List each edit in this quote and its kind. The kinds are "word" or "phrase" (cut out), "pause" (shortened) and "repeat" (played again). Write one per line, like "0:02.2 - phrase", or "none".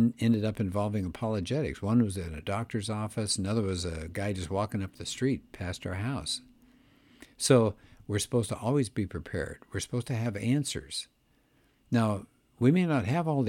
none